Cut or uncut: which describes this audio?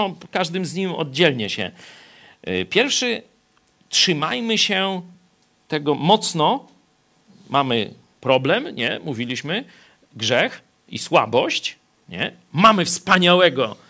uncut